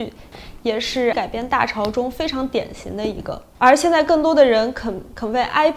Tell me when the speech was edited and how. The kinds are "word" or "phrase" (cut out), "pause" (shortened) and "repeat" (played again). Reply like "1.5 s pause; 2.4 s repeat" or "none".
1.1 s word